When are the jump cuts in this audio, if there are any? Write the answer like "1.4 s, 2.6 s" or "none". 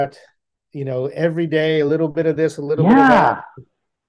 none